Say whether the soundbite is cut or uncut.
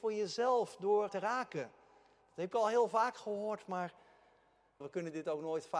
cut